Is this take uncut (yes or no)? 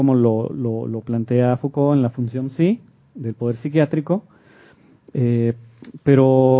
yes